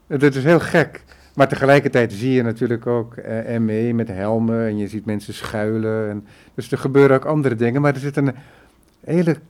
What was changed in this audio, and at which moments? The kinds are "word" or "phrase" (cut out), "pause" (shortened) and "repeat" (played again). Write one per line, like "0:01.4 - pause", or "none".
none